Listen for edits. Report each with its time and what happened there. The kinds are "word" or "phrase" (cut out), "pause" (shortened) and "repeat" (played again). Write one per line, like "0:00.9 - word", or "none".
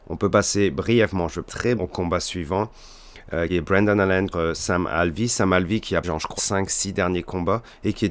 0:01.5 - word
0:01.8 - word
0:03.5 - word
0:04.3 - word
0:06.0 - word
0:06.4 - word

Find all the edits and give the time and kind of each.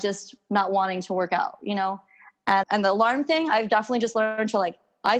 0:02.6 - word

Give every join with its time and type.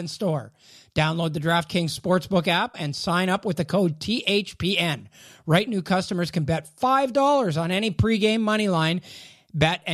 0:02.7 - word
0:05.7 - word

